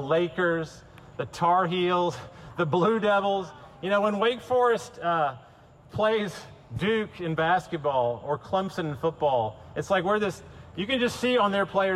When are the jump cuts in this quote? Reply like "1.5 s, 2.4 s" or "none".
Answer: none

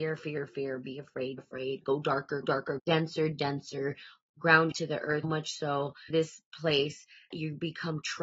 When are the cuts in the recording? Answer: 1.4 s, 2.4 s, 2.8 s, 3.3 s, 4.7 s, 5.2 s, 6.1 s, 7.3 s

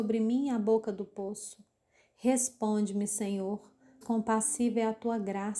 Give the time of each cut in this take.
4.0 s

